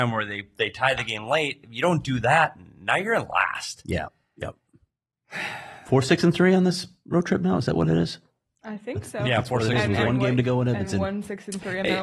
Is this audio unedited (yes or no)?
yes